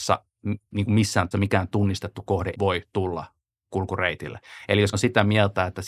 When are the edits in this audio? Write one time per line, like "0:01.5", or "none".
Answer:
0:01.3
0:02.5
0:04.9